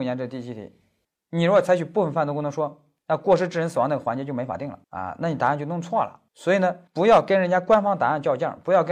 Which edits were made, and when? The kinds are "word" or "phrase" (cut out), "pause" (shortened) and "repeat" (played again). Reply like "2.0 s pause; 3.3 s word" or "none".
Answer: 1.0 s pause; 3.0 s pause; 4.8 s pause; 6.3 s pause; 6.9 s pause